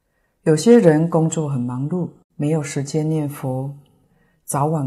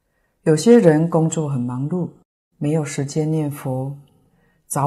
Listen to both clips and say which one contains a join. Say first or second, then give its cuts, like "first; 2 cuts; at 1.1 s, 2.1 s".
first; 1 cut; at 2.2 s